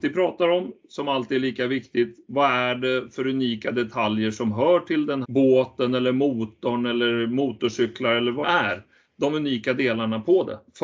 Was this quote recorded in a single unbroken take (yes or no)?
no